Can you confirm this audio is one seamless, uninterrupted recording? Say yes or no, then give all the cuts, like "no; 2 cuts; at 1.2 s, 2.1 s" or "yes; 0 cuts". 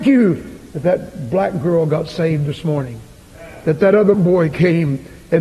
no; 1 cut; at 4.1 s